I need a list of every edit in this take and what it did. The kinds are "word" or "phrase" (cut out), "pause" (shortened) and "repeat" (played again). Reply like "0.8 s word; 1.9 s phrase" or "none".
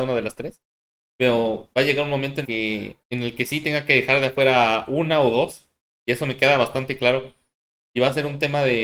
1.7 s pause; 2.4 s word; 3.0 s pause